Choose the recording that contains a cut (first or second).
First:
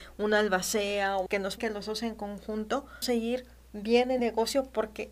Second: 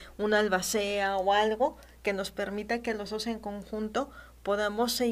first